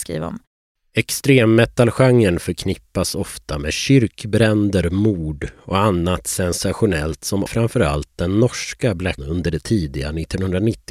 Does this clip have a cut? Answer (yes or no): yes